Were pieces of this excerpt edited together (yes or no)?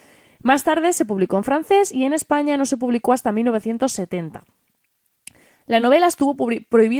no